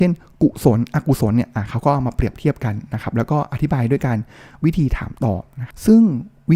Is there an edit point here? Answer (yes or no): no